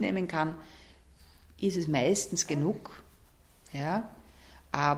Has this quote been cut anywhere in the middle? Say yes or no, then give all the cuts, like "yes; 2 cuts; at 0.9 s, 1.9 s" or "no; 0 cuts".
no; 0 cuts